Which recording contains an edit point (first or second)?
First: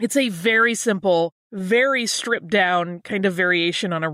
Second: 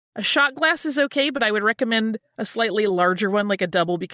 first